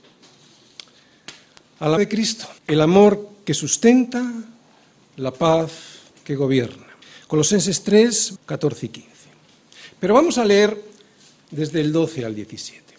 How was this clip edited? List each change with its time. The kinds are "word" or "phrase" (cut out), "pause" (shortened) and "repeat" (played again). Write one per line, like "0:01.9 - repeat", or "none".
0:02.0 - word
0:02.6 - pause
0:06.1 - pause
0:07.0 - pause
0:08.4 - word